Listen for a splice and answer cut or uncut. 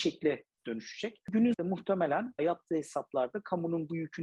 cut